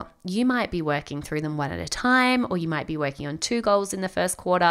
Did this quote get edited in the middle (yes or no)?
no